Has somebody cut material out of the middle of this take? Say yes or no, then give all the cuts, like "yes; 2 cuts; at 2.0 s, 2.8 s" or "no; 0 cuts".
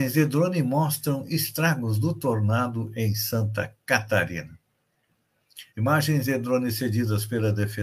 yes; 1 cut; at 5.7 s